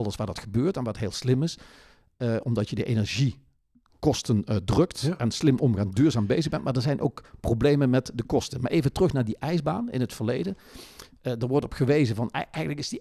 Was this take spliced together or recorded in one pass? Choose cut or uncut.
uncut